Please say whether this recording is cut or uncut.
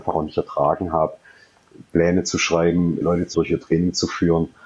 cut